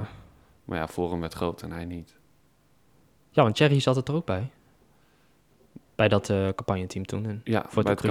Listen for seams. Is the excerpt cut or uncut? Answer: uncut